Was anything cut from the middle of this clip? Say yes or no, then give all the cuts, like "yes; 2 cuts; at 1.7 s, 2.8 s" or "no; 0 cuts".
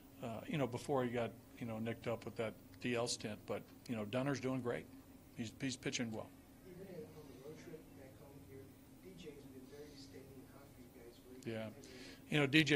yes; 1 cut; at 6.1 s